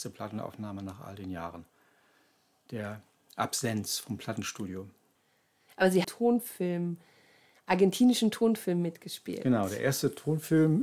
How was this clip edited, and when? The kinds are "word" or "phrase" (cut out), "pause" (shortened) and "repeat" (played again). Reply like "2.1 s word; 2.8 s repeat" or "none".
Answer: 6.0 s phrase